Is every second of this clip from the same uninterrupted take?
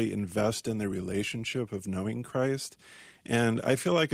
yes; 0 cuts

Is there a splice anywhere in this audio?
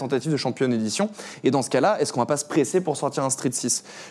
no; 0 cuts

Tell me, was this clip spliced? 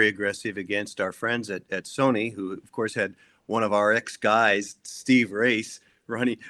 no; 0 cuts

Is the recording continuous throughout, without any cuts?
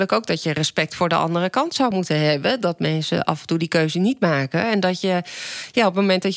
yes; 0 cuts

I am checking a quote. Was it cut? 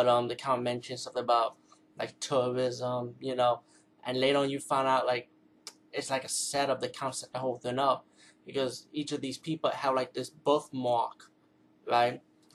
no; 0 cuts

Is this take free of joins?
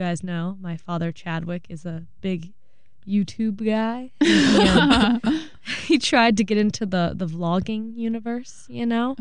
yes; 0 cuts

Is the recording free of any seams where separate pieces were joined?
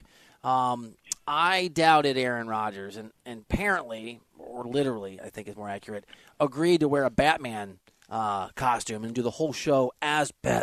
no; 1 cut; at 5.2 s

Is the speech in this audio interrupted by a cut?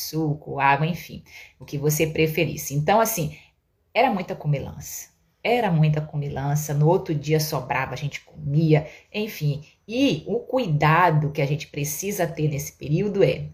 no; 0 cuts

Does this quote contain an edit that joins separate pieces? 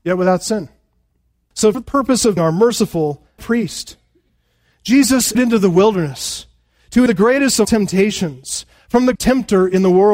yes; 7 cuts; at 1.7 s, 2.4 s, 3.4 s, 5.3 s, 7.1 s, 7.6 s, 9.2 s

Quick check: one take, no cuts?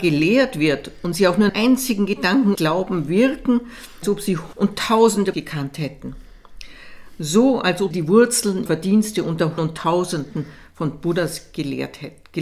no; 8 cuts; at 1.5 s, 2.5 s, 4.0 s, 4.5 s, 5.3 s, 7.9 s, 8.7 s, 9.6 s

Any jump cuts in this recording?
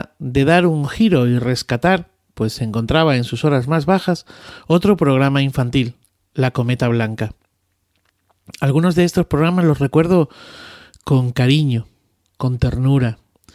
no; 0 cuts

